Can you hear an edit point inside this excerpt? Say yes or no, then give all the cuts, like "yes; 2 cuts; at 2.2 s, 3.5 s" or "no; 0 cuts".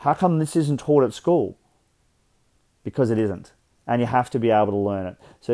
yes; 1 cut; at 3.8 s